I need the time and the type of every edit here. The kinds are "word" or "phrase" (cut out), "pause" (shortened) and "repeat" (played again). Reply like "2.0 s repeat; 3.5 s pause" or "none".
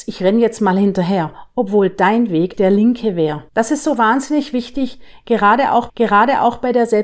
2.5 s word; 3.5 s pause; 5.9 s repeat